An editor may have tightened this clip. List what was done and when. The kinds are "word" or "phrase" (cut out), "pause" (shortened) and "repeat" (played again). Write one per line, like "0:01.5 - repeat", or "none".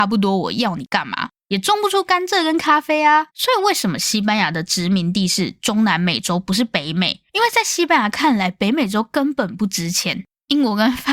0:03.3 - pause
0:07.3 - pause